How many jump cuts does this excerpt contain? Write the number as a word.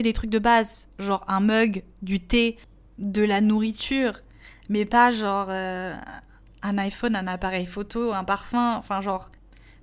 zero